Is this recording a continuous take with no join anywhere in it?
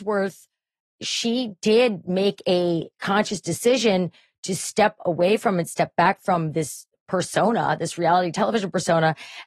yes; 0 cuts

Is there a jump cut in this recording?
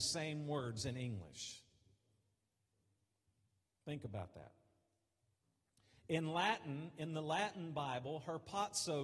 no; 0 cuts

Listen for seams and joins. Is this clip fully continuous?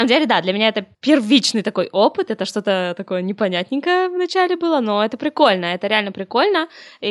no; 1 cut; at 0.9 s

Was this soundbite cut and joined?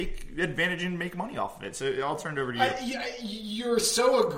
no; 0 cuts

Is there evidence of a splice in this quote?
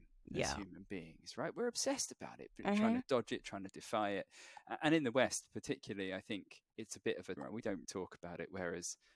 yes; 3 cuts; at 6.7 s, 7.4 s, 7.8 s

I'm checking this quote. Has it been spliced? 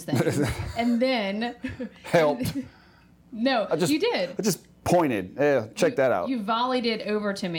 no; 0 cuts

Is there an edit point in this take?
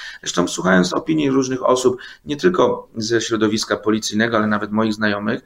no; 0 cuts

